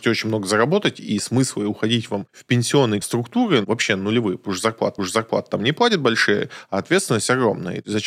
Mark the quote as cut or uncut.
cut